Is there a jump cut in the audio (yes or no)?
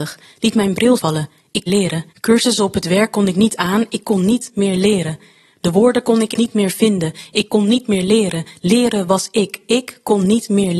yes